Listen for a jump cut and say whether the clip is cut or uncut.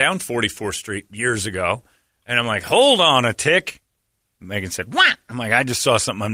uncut